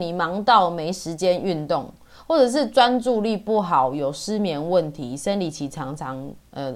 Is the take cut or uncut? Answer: uncut